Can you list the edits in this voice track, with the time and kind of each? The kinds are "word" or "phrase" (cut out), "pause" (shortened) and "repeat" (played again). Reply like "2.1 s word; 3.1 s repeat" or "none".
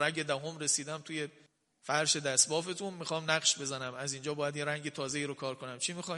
1.5 s pause